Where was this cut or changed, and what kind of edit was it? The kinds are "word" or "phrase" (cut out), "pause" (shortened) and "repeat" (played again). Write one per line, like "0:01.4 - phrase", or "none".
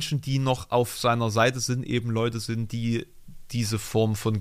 none